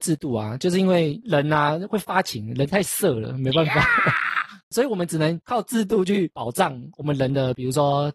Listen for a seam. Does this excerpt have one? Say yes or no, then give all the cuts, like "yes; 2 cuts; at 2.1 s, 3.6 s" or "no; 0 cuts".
no; 0 cuts